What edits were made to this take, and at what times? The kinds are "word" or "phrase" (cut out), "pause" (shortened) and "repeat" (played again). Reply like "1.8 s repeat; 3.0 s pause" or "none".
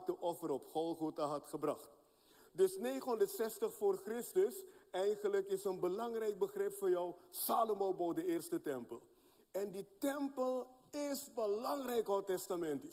none